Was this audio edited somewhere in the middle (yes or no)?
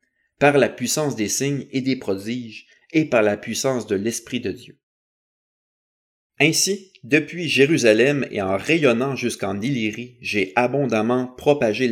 no